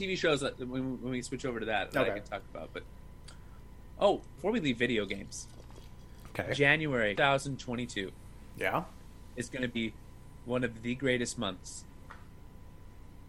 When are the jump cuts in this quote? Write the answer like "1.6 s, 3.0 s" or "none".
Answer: 4.4 s, 7.2 s